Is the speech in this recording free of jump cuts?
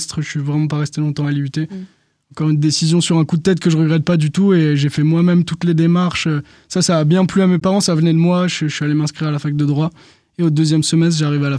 yes; 0 cuts

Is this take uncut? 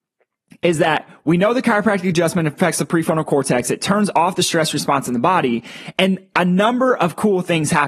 yes; 0 cuts

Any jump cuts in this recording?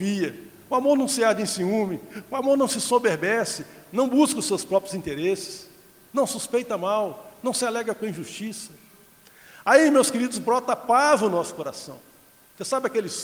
no; 0 cuts

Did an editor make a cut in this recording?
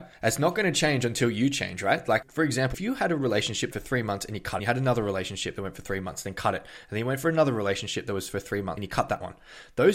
yes; 5 cuts; at 2.2 s, 2.7 s, 3.7 s, 4.6 s, 8.8 s

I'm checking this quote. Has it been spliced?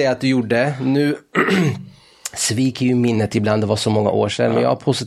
no; 0 cuts

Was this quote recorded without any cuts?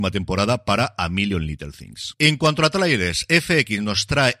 yes; 0 cuts

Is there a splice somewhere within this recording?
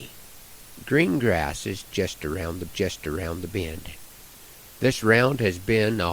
yes; 1 cut; at 2.7 s

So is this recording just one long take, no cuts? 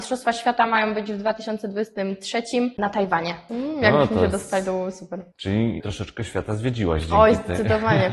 yes; 0 cuts

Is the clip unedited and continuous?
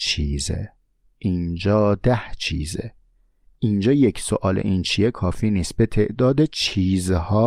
yes; 0 cuts

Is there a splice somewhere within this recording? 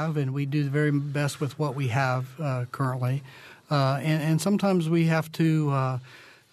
no; 0 cuts

